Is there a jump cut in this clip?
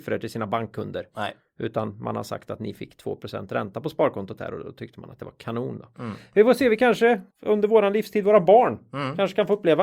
yes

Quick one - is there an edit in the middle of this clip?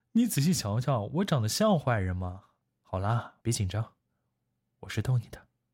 yes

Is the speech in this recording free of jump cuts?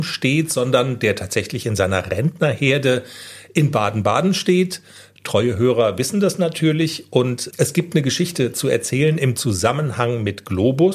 no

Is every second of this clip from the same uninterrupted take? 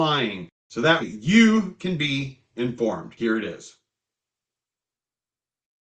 no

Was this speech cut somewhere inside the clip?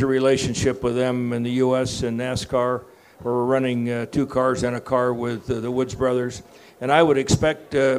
no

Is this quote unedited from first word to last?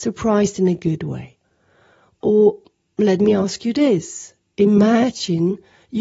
yes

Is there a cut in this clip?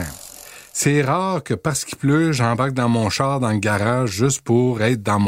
no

